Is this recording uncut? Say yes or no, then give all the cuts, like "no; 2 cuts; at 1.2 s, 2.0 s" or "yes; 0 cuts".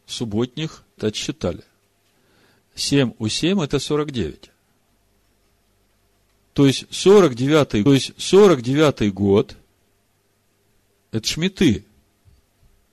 no; 3 cuts; at 1.0 s, 7.9 s, 11.2 s